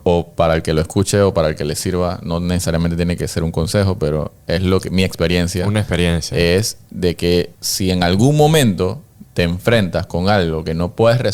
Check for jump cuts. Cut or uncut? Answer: cut